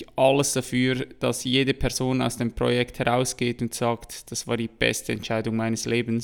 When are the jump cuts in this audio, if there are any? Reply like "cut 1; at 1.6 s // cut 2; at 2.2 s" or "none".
none